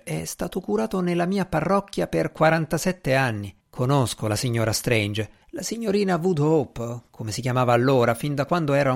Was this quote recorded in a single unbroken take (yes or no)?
no